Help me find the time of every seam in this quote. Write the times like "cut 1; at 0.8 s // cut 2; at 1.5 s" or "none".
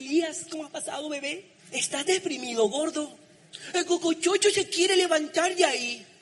cut 1; at 1.6 s